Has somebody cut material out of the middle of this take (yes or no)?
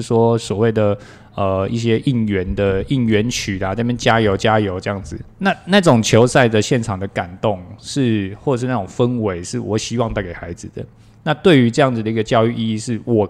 yes